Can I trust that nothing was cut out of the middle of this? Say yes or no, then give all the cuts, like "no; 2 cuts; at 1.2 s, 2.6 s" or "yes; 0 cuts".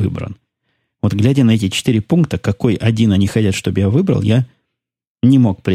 yes; 0 cuts